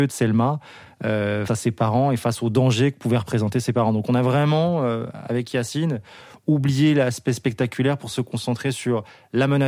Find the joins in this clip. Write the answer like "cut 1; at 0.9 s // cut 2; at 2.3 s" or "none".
cut 1; at 1.5 s